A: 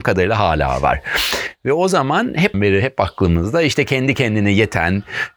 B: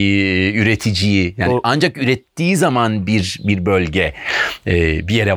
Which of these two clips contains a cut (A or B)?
A